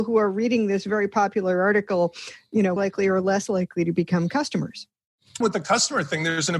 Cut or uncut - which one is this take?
cut